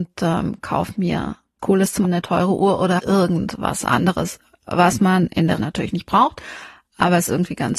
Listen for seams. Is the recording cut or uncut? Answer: cut